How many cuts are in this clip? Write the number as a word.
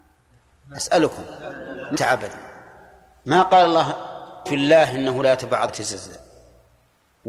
three